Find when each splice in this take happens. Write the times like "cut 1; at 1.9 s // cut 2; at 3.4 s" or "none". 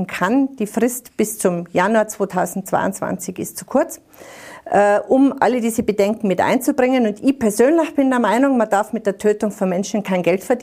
none

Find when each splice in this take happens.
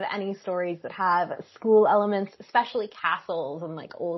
none

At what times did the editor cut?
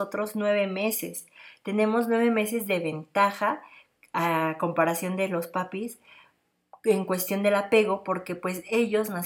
none

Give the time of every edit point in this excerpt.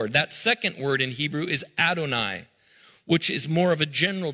none

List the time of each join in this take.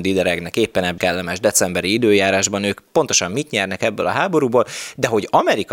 cut 1; at 1.0 s

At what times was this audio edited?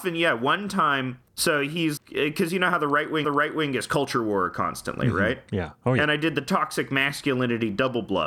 cut 1; at 1.3 s // cut 2; at 2.0 s // cut 3; at 3.2 s

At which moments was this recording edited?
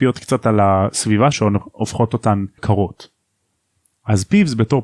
cut 1; at 1.3 s // cut 2; at 2.6 s

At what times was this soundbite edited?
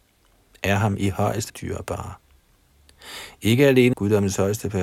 cut 1; at 1.5 s // cut 2; at 3.9 s

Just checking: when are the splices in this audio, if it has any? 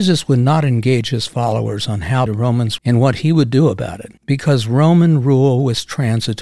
cut 1; at 2.3 s // cut 2; at 2.8 s // cut 3; at 4.2 s

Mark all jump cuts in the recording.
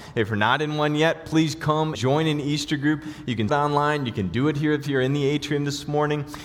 cut 1; at 1.9 s // cut 2; at 3.5 s

